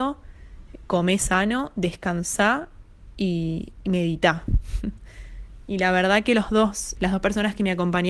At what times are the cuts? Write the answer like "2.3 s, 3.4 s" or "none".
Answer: 7.0 s